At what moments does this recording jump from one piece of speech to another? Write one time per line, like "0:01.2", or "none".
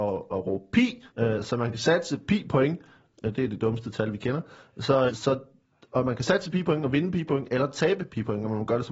0:01.1
0:05.1